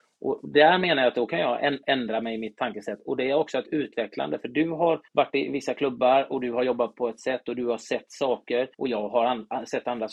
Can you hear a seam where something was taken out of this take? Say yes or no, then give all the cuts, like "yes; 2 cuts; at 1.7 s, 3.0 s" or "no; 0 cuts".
yes; 2 cuts; at 5.1 s, 8.7 s